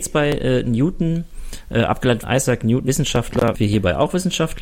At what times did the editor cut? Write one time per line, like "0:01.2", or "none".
0:02.2
0:02.9
0:03.5